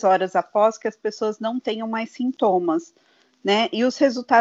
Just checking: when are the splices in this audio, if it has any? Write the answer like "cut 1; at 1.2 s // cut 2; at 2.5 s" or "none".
none